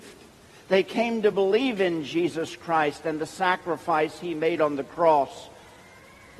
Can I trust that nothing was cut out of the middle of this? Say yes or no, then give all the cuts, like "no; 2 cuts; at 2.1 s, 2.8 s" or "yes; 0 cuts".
yes; 0 cuts